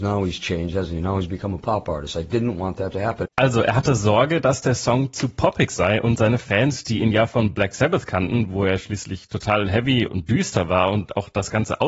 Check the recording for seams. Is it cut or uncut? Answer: cut